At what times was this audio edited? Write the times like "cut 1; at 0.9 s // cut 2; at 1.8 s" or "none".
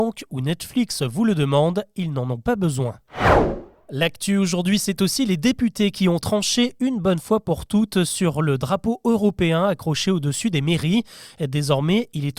none

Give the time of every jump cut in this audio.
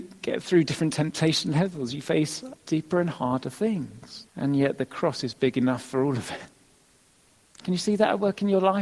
cut 1; at 2.6 s // cut 2; at 4.3 s

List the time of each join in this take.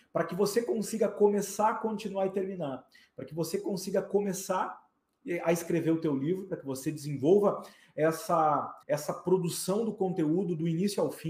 cut 1; at 8.8 s

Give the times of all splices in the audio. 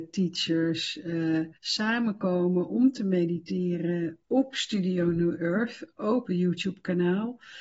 cut 1; at 1.6 s // cut 2; at 4.2 s // cut 3; at 6.2 s

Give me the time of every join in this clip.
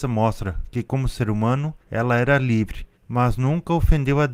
cut 1; at 1.8 s // cut 2; at 2.9 s

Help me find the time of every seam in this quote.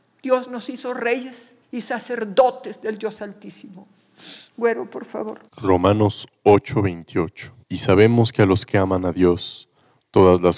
cut 1; at 1.6 s // cut 2; at 4.5 s // cut 3; at 5.5 s // cut 4; at 7.6 s

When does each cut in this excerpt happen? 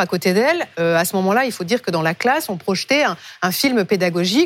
none

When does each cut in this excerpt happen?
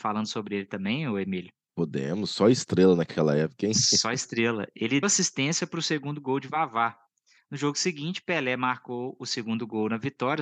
cut 1; at 5.0 s

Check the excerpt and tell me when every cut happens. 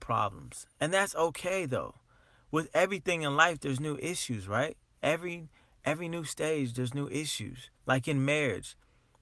cut 1; at 7.8 s

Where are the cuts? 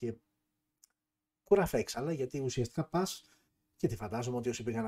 cut 1; at 3.5 s

